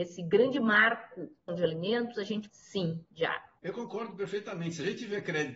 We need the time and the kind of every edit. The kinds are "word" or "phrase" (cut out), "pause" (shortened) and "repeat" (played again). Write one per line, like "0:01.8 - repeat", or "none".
0:01.5 - word
0:02.5 - word
0:03.6 - pause